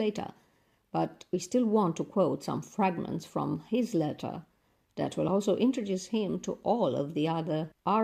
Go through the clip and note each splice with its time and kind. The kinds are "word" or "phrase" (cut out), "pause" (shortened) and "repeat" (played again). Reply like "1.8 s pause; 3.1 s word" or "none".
none